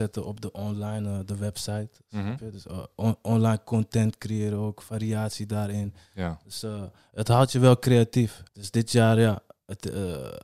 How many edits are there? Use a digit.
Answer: 1